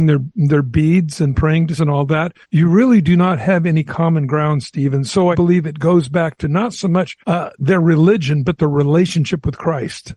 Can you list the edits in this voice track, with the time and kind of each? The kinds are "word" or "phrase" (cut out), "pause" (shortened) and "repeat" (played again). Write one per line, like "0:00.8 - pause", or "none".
0:01.8 - word
0:02.4 - pause
0:05.3 - word
0:07.2 - pause